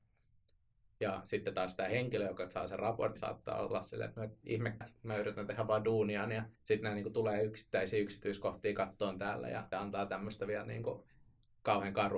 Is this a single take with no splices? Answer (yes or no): no